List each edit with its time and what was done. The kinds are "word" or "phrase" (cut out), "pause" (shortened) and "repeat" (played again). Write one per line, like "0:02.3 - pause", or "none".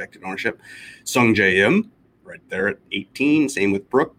none